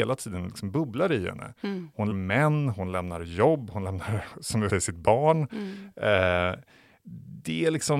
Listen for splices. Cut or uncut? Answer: cut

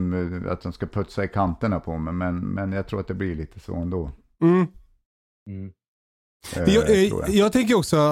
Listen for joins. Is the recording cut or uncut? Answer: uncut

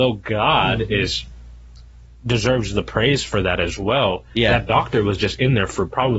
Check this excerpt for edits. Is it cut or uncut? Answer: uncut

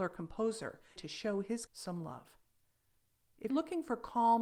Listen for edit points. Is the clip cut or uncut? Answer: cut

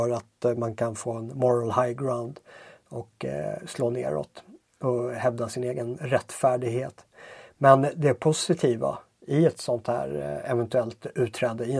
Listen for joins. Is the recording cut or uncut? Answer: uncut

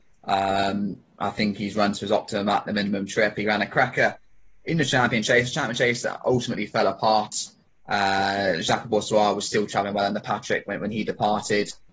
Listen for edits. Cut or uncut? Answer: uncut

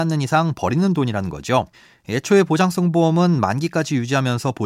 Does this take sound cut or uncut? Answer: cut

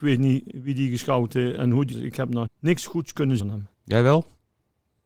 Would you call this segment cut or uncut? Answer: cut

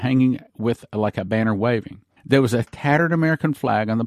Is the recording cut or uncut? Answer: cut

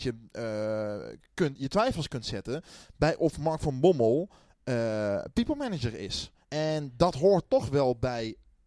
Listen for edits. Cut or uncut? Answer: cut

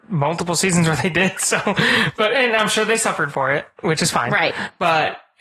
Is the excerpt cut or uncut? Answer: uncut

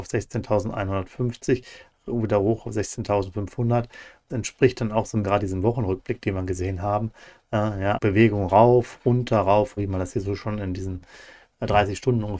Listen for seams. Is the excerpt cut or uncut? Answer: cut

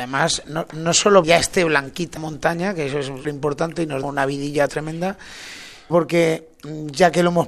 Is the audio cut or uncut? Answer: cut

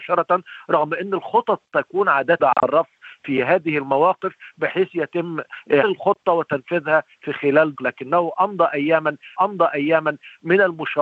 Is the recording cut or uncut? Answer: cut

